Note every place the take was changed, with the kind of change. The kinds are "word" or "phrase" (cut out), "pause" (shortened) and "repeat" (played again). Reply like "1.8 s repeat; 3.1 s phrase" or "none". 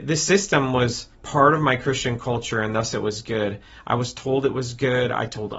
1.1 s pause

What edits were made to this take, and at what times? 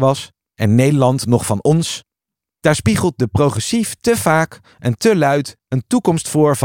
none

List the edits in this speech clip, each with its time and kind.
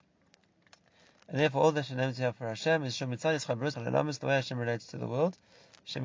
3.7 s word

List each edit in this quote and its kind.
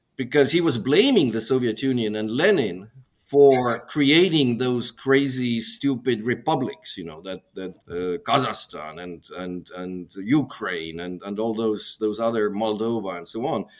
7.8 s pause

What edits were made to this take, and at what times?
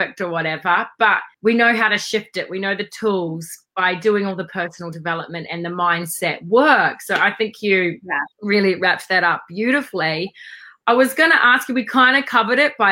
1.3 s pause; 8.3 s pause

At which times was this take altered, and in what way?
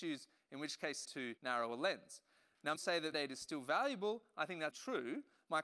1.0 s phrase; 1.4 s pause; 2.8 s phrase; 3.1 s phrase; 4.7 s word

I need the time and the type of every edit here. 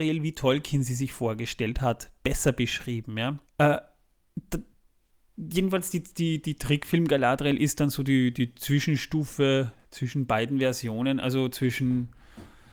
3.5 s pause

